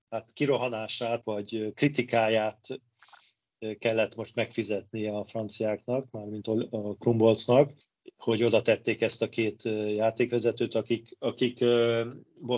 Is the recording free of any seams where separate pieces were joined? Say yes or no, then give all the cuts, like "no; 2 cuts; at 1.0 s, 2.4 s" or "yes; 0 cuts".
no; 2 cuts; at 1.2 s, 7.8 s